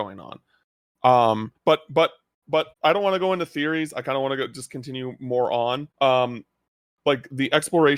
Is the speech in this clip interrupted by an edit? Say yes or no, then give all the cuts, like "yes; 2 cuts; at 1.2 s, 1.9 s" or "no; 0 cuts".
yes; 3 cuts; at 1.6 s, 2.7 s, 5.9 s